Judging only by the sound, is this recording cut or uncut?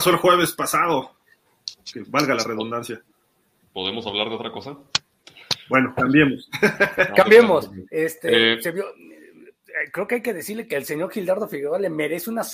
uncut